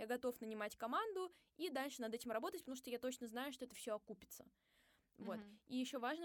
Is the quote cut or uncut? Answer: uncut